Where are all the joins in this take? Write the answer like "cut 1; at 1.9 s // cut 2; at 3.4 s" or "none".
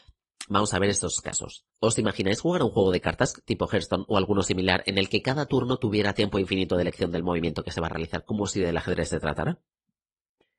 cut 1; at 1.7 s